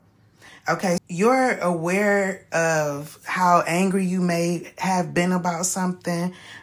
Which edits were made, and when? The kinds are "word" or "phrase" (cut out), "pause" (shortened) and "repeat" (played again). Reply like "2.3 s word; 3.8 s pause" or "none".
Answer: 1.0 s word